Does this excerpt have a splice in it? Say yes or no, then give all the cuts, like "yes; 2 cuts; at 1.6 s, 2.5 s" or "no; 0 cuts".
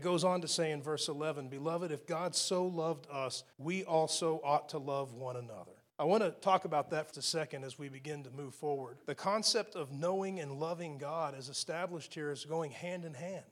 yes; 4 cuts; at 3.5 s, 5.9 s, 7.1 s, 9.0 s